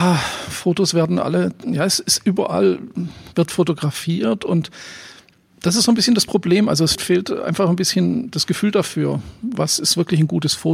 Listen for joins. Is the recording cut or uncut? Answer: cut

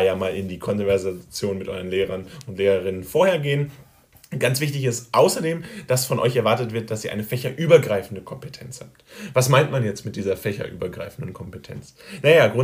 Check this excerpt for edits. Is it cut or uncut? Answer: uncut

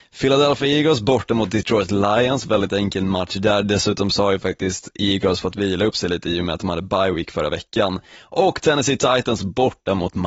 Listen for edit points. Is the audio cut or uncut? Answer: uncut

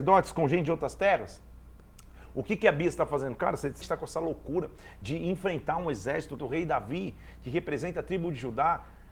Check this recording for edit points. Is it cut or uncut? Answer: cut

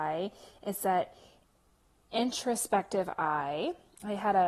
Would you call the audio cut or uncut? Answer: uncut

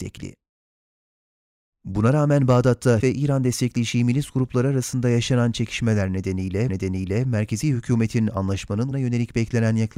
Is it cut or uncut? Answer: cut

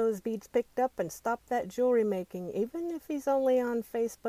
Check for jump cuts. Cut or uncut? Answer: uncut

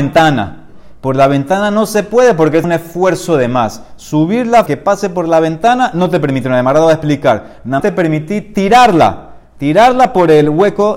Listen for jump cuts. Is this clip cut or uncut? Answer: cut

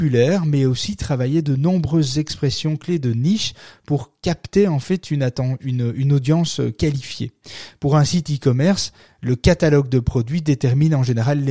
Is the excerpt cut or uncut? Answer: uncut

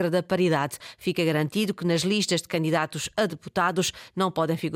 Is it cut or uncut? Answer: uncut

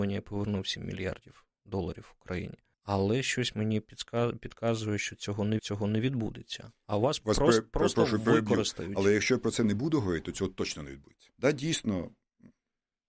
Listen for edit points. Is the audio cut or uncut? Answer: cut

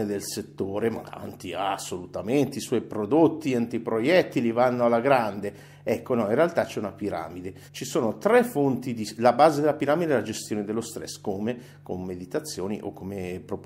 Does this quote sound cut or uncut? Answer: cut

